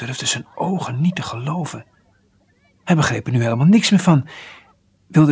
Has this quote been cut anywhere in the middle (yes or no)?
no